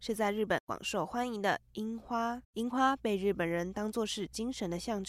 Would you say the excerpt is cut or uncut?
cut